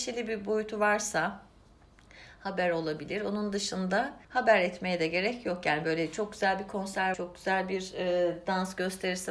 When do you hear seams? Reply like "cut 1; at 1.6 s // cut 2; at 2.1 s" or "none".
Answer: cut 1; at 4.2 s // cut 2; at 7.1 s